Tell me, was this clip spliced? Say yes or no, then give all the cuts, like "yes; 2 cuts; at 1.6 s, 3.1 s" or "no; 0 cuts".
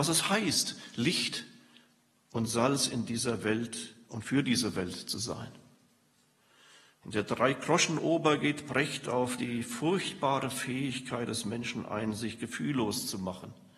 no; 0 cuts